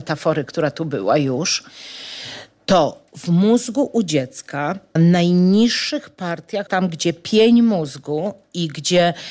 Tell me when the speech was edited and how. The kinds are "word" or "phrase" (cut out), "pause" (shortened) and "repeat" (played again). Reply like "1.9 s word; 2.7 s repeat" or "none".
5.0 s word; 6.7 s word